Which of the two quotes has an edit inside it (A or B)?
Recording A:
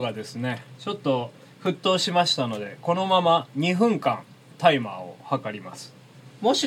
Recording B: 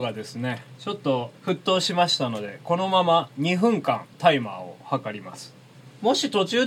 B